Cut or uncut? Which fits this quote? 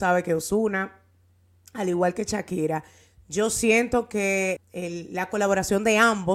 cut